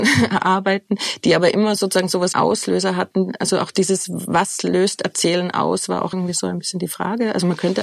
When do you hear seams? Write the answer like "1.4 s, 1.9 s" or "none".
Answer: 2.3 s, 6.1 s

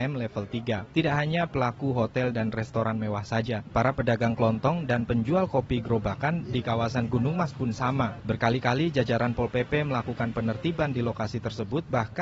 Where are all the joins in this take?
none

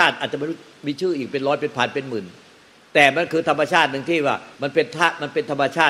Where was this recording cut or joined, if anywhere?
4.5 s

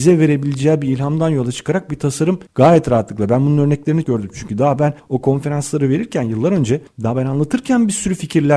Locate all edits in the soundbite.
2.5 s, 4.0 s

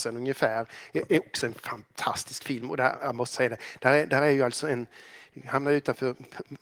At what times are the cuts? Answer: none

